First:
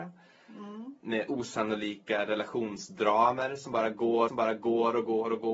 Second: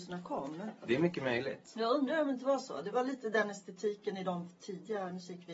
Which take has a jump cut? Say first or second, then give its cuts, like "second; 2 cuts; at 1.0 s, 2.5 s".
first; 1 cut; at 4.3 s